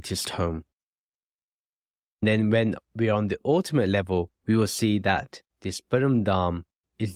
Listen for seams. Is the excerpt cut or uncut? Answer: cut